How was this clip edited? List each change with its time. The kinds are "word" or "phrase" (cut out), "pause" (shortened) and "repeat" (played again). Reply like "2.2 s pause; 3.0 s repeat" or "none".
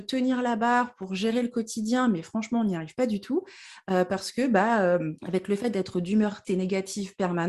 5.2 s pause; 6.4 s word